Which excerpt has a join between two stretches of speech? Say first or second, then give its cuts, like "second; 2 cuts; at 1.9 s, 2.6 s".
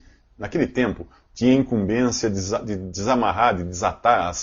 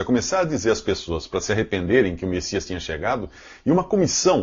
first; 1 cut; at 1.3 s